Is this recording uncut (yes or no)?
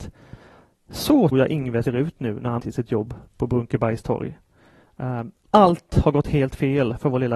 no